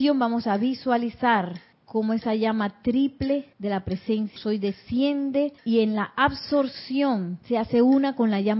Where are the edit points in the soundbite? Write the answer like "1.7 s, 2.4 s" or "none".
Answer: 1.7 s, 3.5 s, 4.4 s, 5.6 s, 7.4 s

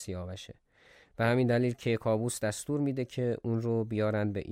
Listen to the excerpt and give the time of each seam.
none

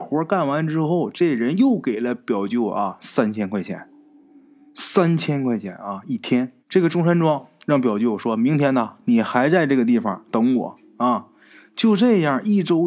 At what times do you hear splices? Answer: 6.6 s

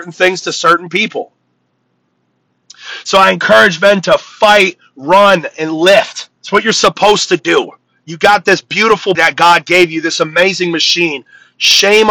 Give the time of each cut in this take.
6.4 s, 9.1 s

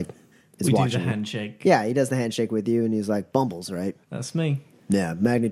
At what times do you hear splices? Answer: 4.0 s

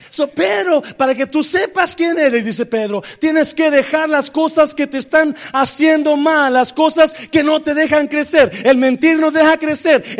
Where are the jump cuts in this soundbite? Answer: none

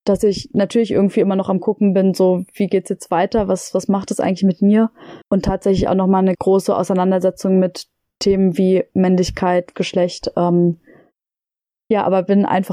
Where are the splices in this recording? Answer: 5.2 s, 6.3 s, 9.7 s

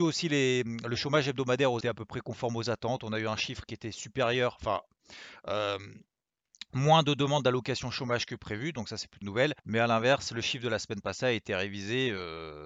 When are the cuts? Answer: 1.8 s, 9.2 s, 9.6 s

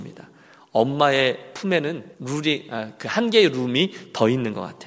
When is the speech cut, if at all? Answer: 2.1 s

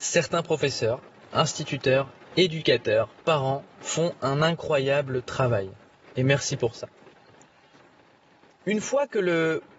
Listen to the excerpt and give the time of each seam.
none

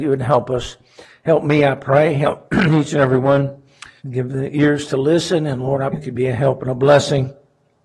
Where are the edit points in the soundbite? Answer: 4.0 s, 5.9 s

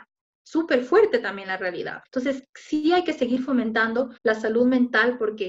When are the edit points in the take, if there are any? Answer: 2.0 s, 4.2 s

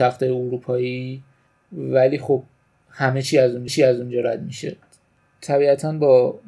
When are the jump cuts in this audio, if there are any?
3.7 s

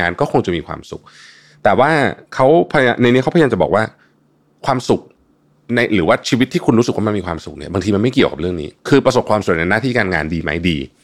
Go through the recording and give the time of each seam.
none

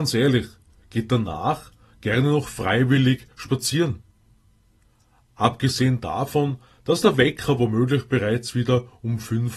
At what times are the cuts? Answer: none

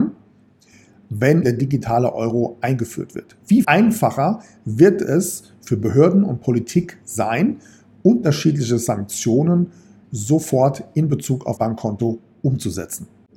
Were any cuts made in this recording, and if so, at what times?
1.4 s, 3.6 s, 10.0 s, 11.6 s

